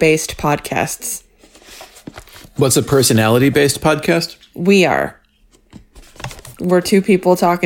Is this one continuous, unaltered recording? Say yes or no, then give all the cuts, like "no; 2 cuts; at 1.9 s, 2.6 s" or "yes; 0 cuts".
yes; 0 cuts